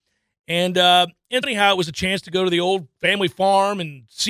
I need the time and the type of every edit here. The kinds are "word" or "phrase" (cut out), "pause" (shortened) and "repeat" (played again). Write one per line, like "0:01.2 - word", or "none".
0:01.4 - word